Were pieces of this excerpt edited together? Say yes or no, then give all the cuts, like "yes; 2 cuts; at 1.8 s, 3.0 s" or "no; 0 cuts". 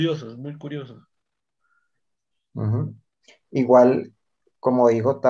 no; 0 cuts